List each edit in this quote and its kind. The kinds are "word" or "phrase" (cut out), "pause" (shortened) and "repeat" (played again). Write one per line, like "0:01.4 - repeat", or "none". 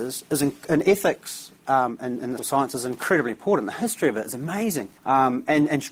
0:01.6 - pause
0:02.4 - word
0:05.0 - pause